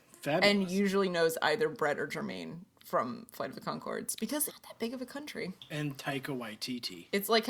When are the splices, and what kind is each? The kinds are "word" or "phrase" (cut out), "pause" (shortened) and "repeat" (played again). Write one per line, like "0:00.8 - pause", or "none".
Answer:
0:04.5 - word